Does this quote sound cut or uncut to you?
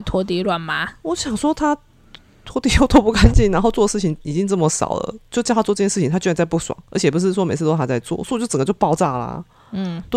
uncut